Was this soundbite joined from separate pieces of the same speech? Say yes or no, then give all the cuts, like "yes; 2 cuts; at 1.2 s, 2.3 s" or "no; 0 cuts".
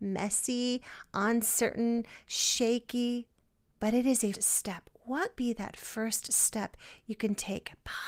yes; 2 cuts; at 4.3 s, 5.4 s